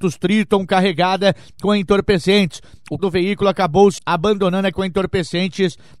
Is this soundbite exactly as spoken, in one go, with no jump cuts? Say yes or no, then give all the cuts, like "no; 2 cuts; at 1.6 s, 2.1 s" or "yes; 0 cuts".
no; 3 cuts; at 3.0 s, 4.0 s, 4.7 s